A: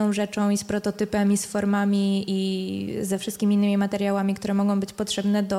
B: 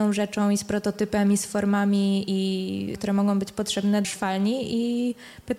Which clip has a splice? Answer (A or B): B